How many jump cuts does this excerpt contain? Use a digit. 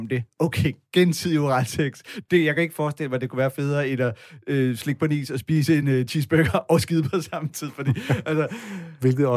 0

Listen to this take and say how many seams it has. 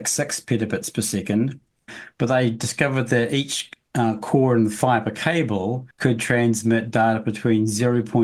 1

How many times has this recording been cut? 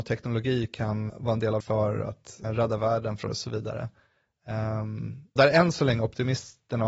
5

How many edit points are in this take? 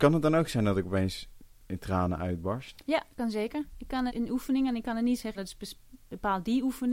2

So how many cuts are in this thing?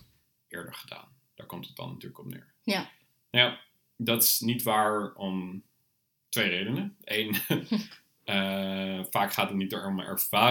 0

